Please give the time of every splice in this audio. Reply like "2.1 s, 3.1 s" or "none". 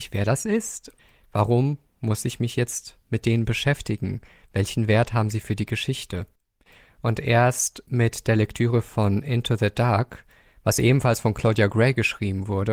none